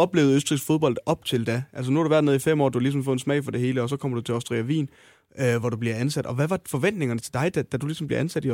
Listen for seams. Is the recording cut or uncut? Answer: uncut